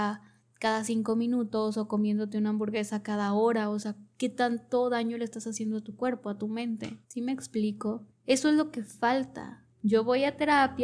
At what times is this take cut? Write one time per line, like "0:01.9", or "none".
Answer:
0:07.0
0:08.1
0:09.7